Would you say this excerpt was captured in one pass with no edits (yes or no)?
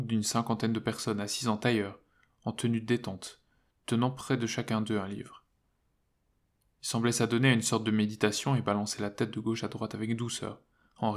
yes